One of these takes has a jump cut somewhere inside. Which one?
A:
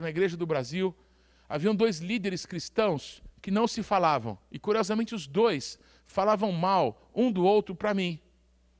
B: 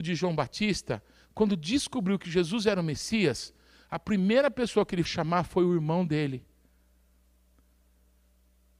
B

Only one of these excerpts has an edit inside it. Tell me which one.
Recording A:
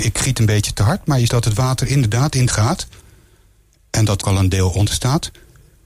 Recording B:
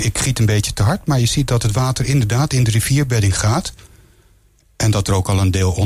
A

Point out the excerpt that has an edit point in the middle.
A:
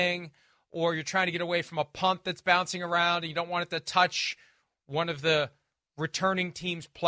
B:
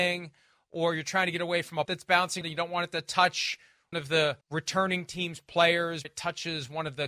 B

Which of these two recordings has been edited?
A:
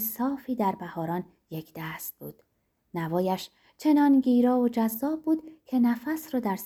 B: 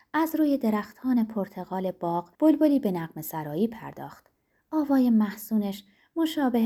B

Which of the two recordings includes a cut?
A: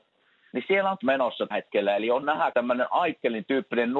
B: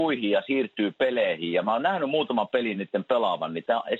A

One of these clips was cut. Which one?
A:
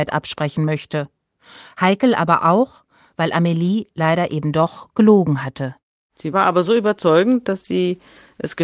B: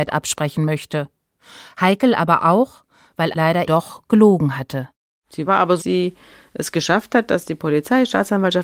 B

